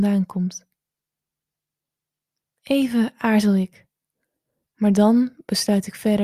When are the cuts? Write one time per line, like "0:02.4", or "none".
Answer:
none